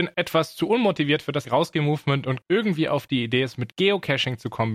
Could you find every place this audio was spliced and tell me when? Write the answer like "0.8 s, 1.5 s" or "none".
1.4 s, 2.4 s

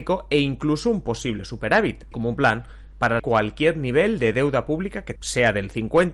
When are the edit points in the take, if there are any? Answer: 2.1 s, 3.2 s, 5.2 s

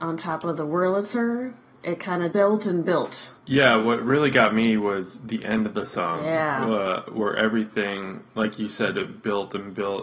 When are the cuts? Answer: 2.3 s, 3.4 s

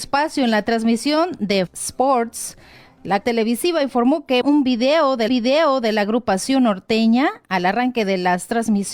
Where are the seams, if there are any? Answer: 1.7 s, 3.2 s, 4.4 s, 5.3 s, 7.4 s

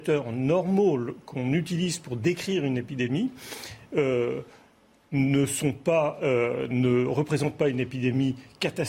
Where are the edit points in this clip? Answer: none

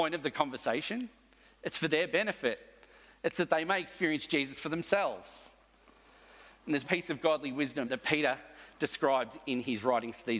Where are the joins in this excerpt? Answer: 6.8 s, 7.8 s

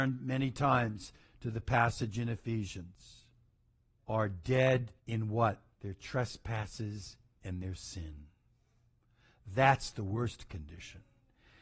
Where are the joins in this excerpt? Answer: 4.0 s, 5.0 s, 5.7 s

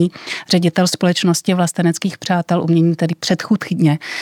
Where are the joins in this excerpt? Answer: none

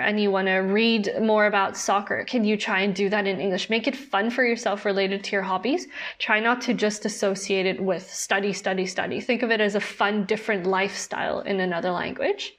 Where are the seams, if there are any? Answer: none

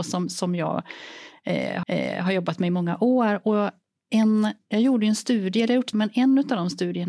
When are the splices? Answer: 1.8 s, 5.9 s

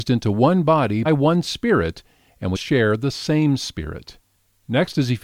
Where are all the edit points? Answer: 1.0 s, 2.5 s

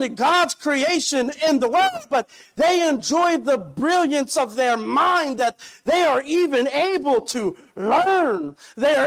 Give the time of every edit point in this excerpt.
none

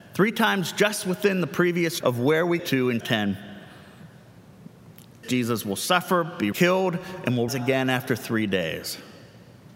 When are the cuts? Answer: 2.0 s, 2.6 s, 3.0 s, 5.2 s, 6.5 s, 7.5 s

